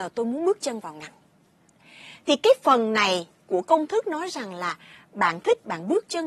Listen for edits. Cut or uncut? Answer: uncut